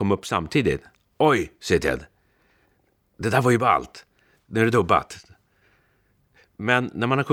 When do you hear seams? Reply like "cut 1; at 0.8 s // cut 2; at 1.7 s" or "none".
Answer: none